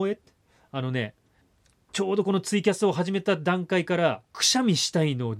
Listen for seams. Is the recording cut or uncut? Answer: cut